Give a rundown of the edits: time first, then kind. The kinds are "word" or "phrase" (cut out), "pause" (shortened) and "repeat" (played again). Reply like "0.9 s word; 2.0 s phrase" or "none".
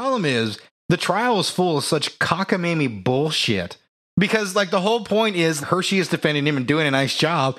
3.9 s pause; 5.6 s word